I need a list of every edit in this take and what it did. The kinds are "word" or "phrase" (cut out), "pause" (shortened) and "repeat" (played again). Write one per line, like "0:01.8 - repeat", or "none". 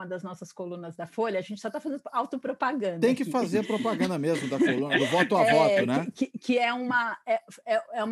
none